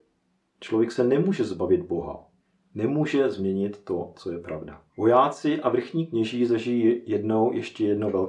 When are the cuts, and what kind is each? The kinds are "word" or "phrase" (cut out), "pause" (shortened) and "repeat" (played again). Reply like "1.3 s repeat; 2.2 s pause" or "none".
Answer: 2.4 s pause; 4.9 s pause